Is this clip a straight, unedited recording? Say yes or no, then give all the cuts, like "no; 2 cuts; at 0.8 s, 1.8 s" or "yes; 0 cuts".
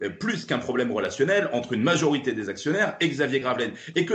yes; 0 cuts